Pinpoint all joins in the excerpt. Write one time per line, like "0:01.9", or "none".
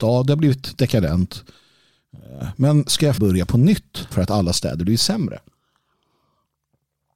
0:03.2
0:04.1